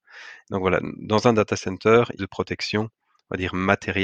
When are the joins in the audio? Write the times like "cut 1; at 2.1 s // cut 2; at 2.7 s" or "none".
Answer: cut 1; at 2.2 s